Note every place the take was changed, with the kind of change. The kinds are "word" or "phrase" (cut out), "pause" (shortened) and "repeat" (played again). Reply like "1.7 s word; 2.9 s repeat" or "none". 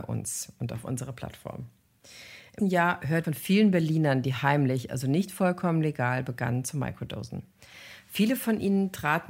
2.6 s word; 3.2 s word